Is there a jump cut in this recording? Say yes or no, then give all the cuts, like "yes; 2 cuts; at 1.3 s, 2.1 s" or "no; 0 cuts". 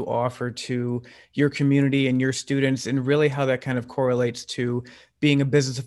no; 0 cuts